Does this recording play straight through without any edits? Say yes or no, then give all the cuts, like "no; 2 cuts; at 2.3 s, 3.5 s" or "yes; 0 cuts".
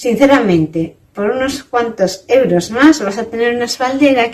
yes; 0 cuts